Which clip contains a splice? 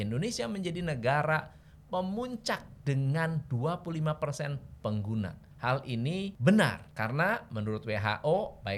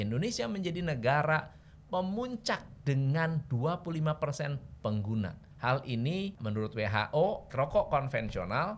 second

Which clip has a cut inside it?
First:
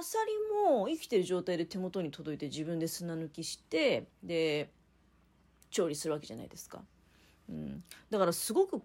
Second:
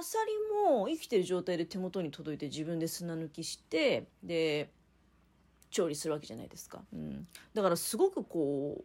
second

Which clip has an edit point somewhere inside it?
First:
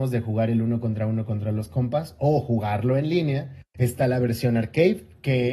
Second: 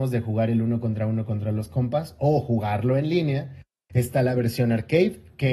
first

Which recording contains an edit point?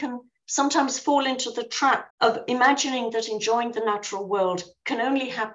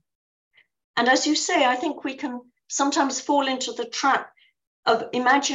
first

